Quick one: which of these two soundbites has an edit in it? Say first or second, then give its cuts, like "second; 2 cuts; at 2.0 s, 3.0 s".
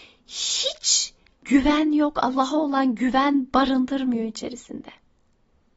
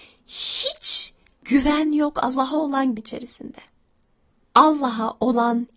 second; 1 cut; at 3.0 s